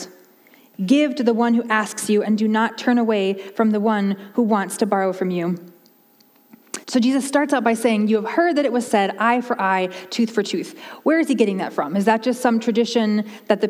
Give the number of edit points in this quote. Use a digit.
1